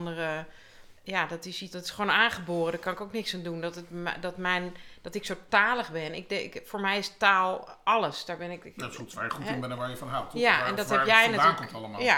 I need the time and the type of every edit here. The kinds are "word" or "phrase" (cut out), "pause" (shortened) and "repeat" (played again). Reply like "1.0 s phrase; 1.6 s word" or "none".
1.0 s pause; 1.7 s word